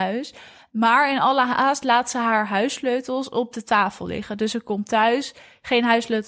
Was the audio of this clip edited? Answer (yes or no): no